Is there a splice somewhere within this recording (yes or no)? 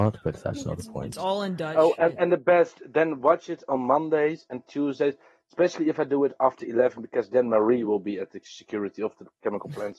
no